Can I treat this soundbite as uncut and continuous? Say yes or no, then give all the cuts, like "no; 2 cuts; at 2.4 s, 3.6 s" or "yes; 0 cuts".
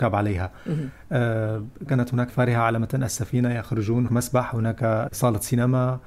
no; 4 cuts; at 1.9 s, 2.3 s, 4.1 s, 5.1 s